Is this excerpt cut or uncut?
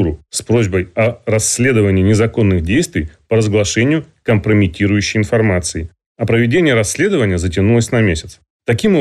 uncut